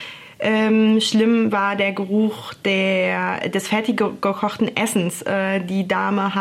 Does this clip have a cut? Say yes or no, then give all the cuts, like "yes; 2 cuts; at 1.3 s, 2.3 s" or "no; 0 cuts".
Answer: no; 0 cuts